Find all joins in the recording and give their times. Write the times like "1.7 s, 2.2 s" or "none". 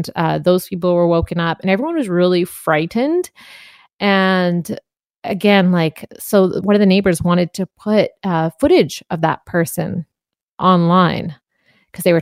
6.6 s